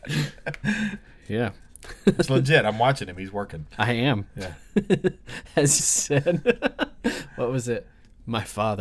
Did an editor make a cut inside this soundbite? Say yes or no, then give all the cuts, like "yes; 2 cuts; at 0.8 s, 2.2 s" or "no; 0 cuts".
yes; 1 cut; at 5.8 s